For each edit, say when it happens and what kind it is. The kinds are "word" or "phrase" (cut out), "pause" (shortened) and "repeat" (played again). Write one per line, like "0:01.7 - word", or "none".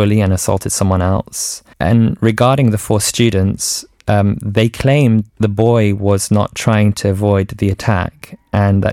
0:01.7 - pause
0:05.3 - pause